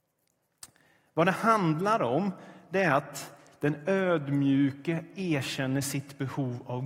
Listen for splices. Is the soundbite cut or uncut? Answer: uncut